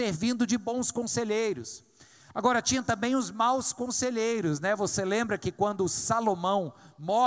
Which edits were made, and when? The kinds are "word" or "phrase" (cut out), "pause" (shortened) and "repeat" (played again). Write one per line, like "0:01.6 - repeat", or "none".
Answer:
none